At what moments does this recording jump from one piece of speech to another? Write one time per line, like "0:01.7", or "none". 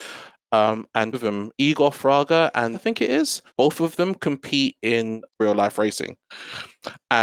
0:01.1
0:02.7
0:03.5
0:05.3